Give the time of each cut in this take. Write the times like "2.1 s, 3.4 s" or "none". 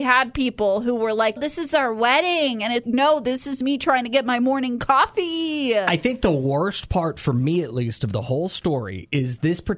1.4 s, 2.8 s

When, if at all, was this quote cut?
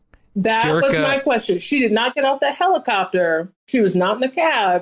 3.5 s

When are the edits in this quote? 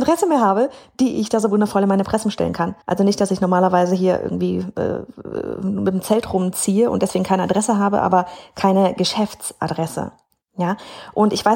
2.8 s

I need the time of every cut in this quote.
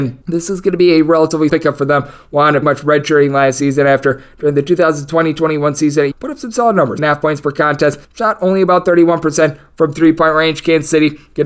1.5 s, 2.6 s, 6.1 s, 7.0 s, 8.0 s

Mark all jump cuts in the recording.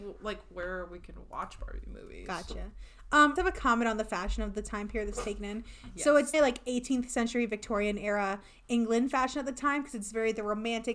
3.4 s, 6.3 s

